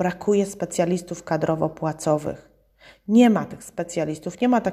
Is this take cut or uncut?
uncut